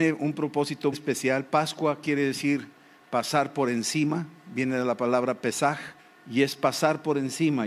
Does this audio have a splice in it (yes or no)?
yes